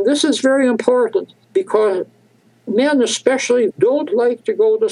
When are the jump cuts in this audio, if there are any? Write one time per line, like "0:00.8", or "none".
0:01.4
0:03.7